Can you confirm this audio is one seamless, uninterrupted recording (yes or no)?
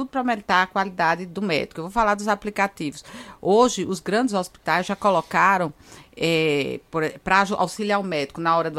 yes